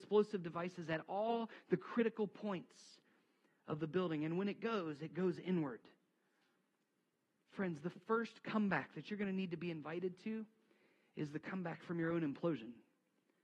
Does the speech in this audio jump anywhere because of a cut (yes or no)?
no